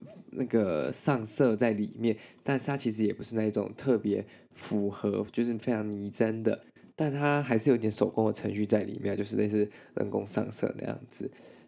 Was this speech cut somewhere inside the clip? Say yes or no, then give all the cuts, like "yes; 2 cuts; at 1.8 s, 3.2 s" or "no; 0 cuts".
no; 0 cuts